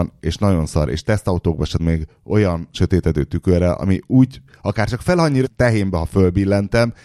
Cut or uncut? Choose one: cut